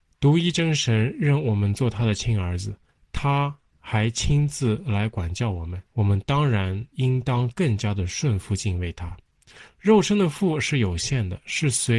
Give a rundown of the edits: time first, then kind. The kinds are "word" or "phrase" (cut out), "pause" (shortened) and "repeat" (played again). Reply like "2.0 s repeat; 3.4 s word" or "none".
2.9 s pause; 5.9 s pause; 6.9 s pause